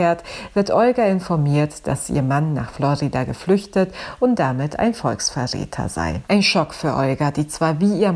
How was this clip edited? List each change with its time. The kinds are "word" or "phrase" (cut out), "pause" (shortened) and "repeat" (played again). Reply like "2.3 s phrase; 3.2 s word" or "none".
6.3 s pause